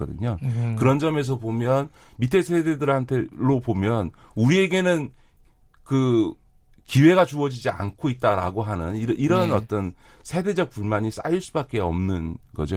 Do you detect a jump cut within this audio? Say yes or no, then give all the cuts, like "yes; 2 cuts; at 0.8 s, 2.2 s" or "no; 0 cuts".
no; 0 cuts